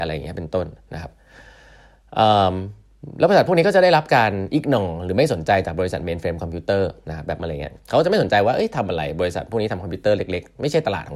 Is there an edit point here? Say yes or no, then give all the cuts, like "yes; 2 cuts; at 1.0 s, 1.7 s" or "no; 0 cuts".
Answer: yes; 1 cut; at 7.4 s